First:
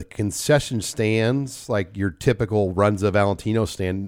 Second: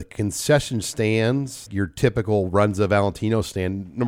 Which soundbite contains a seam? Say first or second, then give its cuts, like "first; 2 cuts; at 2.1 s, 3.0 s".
second; 1 cut; at 1.7 s